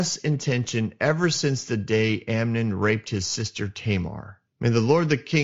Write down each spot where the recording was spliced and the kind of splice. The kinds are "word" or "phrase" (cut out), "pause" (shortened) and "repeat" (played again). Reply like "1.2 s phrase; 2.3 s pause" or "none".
4.5 s pause